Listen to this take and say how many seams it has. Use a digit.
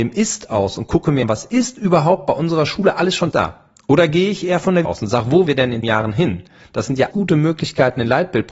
6